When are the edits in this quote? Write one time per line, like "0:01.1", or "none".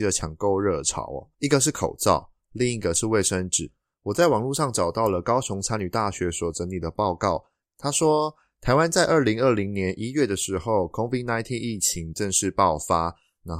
0:01.3